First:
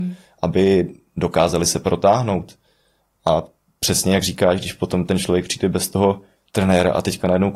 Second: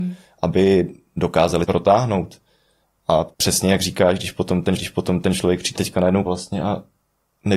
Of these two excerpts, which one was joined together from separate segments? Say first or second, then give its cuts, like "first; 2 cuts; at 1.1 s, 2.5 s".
second; 5 cuts; at 1.6 s, 3.3 s, 4.8 s, 5.8 s, 6.3 s